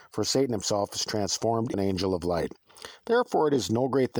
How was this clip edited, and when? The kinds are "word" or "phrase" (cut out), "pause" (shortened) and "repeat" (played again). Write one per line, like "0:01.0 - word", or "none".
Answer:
0:01.7 - word